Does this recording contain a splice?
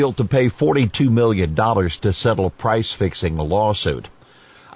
no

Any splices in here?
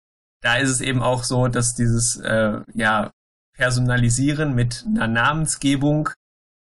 no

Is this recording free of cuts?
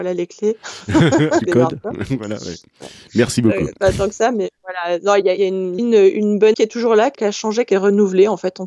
no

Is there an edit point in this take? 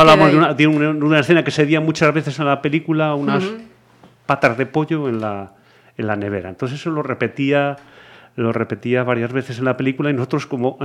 no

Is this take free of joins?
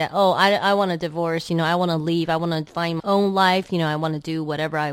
no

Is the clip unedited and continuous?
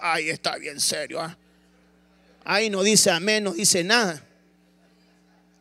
yes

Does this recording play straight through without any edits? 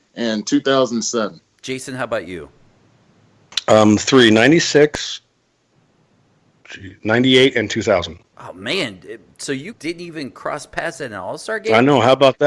no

